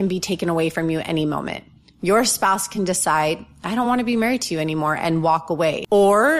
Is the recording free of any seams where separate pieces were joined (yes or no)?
yes